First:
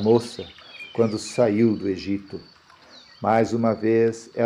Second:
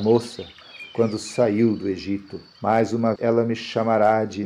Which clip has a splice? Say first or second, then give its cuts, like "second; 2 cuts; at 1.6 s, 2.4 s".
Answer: second; 2 cuts; at 2.5 s, 3.2 s